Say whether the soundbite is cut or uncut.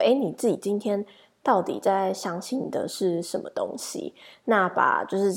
uncut